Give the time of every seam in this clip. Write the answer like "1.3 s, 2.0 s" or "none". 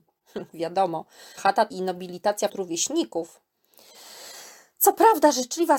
1.4 s, 1.7 s, 2.5 s